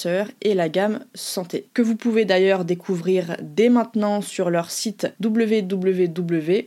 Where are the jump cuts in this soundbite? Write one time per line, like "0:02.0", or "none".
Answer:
0:01.7
0:05.1